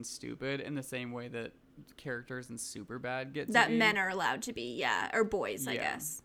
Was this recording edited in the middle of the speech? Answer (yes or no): no